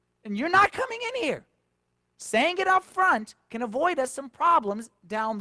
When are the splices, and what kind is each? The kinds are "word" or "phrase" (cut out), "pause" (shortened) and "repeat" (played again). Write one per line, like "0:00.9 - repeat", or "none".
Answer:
none